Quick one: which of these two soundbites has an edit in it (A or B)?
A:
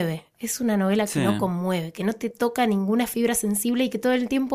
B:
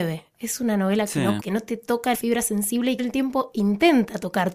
B